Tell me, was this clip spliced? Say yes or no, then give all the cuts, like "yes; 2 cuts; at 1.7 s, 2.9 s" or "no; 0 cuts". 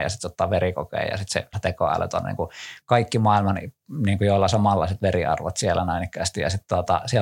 yes; 1 cut; at 1.5 s